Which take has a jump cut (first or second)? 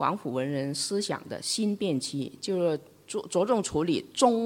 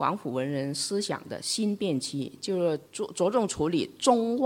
second